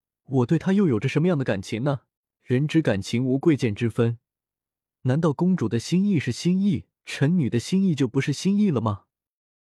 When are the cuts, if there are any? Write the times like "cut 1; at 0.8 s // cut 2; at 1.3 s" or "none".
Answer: cut 1; at 2.2 s // cut 2; at 7.0 s